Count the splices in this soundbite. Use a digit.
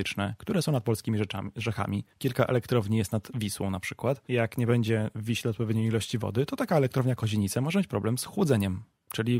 2